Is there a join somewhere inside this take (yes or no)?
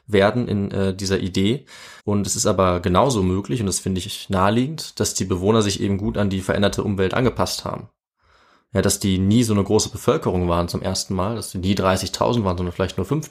yes